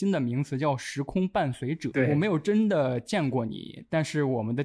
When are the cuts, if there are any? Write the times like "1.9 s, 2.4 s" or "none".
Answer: 1.9 s